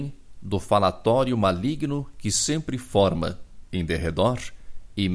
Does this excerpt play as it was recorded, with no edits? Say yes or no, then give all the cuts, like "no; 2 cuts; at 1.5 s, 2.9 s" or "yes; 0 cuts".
yes; 0 cuts